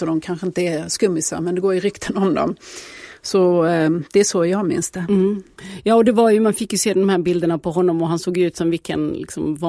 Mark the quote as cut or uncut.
uncut